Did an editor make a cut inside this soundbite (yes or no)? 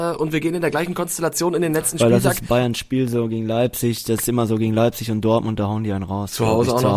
no